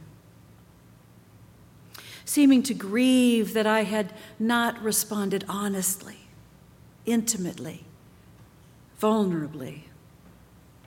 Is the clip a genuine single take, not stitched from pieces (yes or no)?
yes